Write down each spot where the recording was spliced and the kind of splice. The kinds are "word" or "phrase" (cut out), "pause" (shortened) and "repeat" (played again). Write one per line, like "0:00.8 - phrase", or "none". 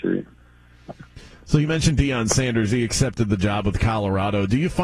none